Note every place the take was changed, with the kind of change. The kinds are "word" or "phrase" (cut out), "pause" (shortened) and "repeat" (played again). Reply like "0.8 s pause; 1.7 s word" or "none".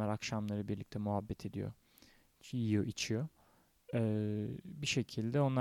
none